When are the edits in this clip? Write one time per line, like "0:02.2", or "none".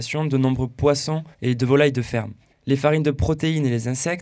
0:01.3
0:02.5